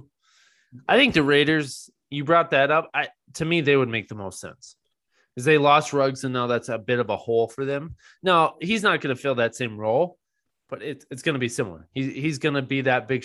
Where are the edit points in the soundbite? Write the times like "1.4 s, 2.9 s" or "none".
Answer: none